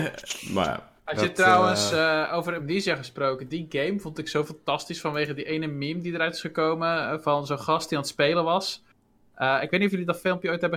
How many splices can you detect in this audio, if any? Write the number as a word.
zero